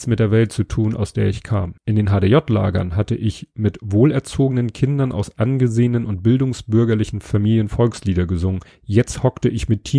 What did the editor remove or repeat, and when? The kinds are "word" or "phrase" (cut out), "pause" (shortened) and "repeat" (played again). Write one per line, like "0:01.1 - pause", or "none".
0:01.8 - pause

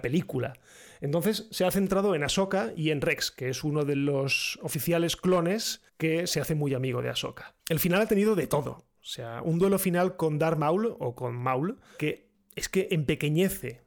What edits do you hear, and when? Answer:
0:05.9 - pause
0:07.6 - pause

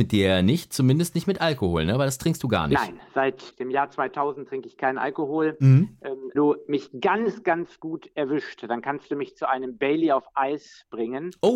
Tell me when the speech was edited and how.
0:03.5 - word
0:06.3 - word
0:07.4 - word

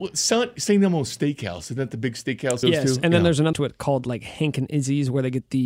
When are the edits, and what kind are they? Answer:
0:02.6 - phrase
0:03.5 - phrase

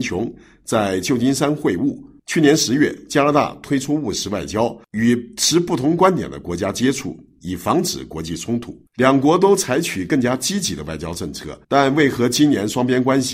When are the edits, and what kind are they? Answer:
0:02.2 - pause
0:08.9 - pause
0:11.6 - pause

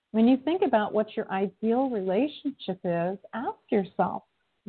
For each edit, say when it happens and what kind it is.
none

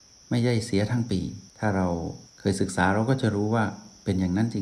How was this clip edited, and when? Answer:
0:01.5 - pause
0:02.3 - pause

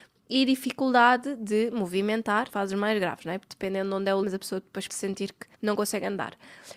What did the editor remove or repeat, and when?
0:02.5 - word
0:04.2 - word
0:04.9 - word
0:05.5 - pause

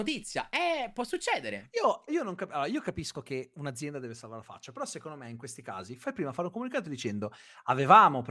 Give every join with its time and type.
0:02.1 - word

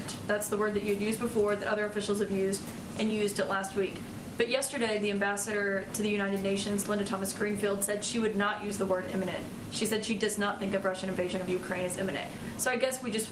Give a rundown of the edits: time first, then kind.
none

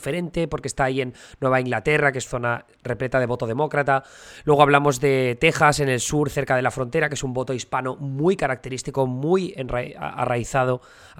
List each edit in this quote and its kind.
0:02.3 - word

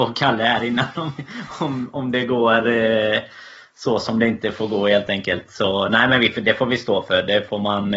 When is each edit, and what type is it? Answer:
none

